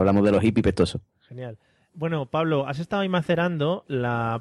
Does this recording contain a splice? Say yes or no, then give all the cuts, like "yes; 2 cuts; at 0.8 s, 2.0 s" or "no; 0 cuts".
no; 0 cuts